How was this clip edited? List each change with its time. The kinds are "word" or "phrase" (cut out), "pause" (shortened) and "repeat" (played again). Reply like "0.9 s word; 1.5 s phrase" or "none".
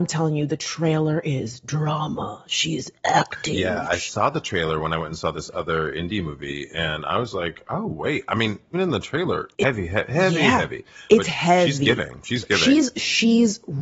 8.7 s word; 9.6 s phrase